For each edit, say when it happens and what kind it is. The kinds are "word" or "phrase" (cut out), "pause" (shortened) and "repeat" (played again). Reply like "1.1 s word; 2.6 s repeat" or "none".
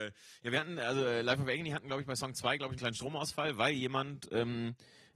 2.8 s word